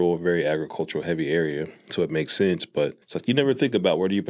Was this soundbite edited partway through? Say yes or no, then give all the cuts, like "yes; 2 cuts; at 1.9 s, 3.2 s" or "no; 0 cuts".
yes; 1 cut; at 3.0 s